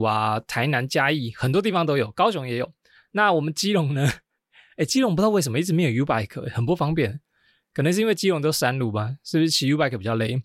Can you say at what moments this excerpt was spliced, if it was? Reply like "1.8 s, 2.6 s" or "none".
none